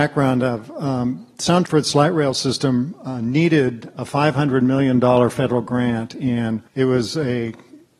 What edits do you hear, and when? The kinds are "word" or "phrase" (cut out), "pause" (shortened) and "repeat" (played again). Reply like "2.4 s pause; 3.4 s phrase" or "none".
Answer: 1.6 s word; 6.7 s pause

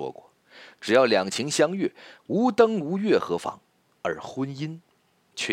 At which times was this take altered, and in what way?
3.7 s pause

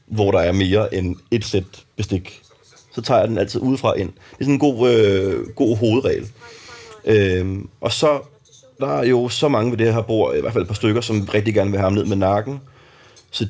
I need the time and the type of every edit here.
8.8 s word

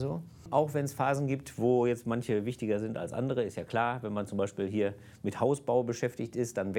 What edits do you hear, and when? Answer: none

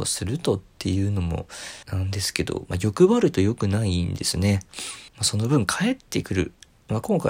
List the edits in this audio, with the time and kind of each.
1.8 s pause; 5.1 s pause

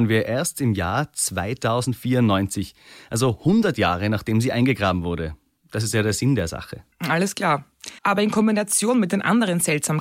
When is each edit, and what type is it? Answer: 6.9 s pause; 8.0 s pause

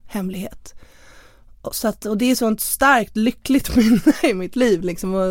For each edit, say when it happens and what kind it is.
none

